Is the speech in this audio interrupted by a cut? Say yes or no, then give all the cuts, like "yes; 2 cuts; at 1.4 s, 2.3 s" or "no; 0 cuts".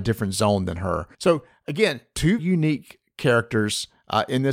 yes; 2 cuts; at 1.1 s, 2.4 s